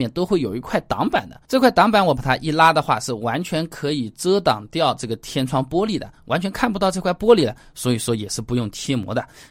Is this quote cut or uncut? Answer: cut